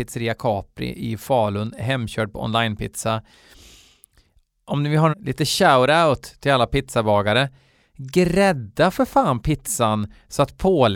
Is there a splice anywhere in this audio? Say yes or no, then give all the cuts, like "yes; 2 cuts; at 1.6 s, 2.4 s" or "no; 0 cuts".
yes; 1 cut; at 5.1 s